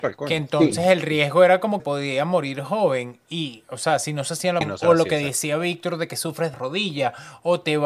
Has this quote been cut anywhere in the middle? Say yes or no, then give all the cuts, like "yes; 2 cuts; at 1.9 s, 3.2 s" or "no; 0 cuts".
yes; 3 cuts; at 1.8 s, 4.6 s, 6.5 s